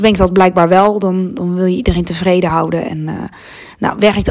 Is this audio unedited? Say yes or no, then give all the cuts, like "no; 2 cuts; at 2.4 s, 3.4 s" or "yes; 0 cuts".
yes; 0 cuts